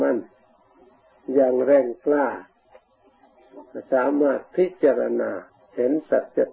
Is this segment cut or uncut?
cut